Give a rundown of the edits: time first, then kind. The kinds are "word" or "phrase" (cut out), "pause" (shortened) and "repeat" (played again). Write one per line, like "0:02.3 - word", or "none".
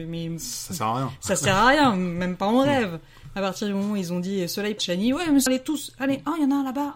0:04.8 - phrase
0:05.5 - word